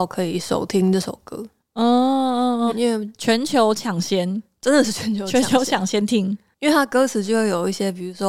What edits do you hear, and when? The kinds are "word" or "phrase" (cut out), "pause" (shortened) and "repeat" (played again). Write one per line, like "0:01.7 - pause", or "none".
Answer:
0:02.7 - word

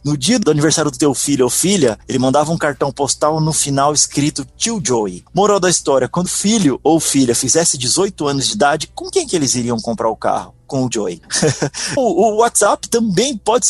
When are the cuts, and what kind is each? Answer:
0:06.3 - word
0:10.9 - word
0:12.0 - word

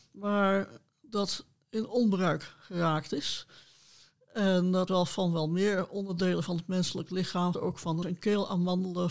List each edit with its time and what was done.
0:04.9 - word
0:07.5 - word
0:08.0 - word

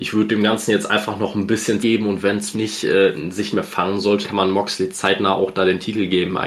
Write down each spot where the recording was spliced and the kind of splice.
0:01.8 - word
0:02.5 - word
0:03.5 - word
0:04.2 - word

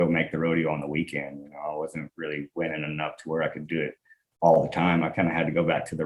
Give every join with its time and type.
none

